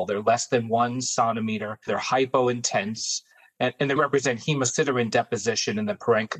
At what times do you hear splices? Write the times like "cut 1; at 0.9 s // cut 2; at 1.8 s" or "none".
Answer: cut 1; at 1.9 s // cut 2; at 4.0 s